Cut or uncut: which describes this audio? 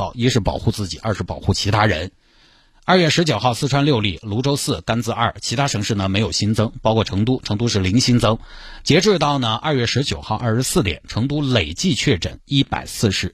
uncut